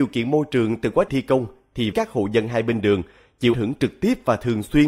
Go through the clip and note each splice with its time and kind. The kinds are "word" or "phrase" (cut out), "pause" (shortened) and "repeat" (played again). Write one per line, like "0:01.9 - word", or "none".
0:01.1 - word
0:01.9 - word
0:03.5 - word